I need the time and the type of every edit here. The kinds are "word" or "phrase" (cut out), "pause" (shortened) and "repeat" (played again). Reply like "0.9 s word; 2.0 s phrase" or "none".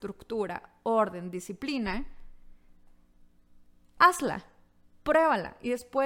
none